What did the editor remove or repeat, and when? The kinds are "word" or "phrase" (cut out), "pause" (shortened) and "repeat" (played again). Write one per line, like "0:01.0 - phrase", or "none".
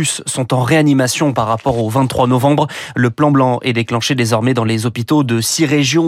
none

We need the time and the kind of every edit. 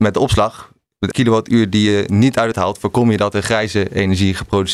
0:01.1 - word
0:02.5 - phrase

